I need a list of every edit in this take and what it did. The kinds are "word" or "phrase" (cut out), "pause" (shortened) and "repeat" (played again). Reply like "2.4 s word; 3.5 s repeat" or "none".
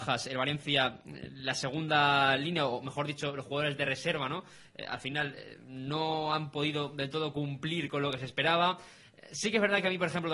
none